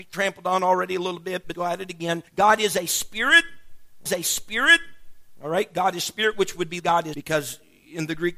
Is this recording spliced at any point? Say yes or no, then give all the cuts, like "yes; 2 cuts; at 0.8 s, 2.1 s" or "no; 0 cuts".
yes; 5 cuts; at 1.5 s, 2.3 s, 4.1 s, 6.8 s, 7.1 s